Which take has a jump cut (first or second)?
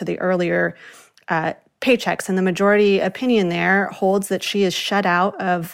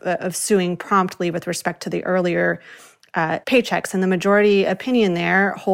second